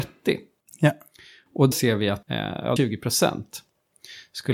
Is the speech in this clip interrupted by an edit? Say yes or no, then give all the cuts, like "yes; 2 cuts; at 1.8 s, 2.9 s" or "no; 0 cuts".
yes; 3 cuts; at 1.7 s, 2.2 s, 2.8 s